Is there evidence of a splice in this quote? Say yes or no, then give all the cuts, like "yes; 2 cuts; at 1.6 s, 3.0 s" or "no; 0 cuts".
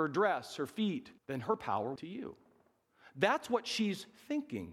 yes; 2 cuts; at 1.2 s, 2.0 s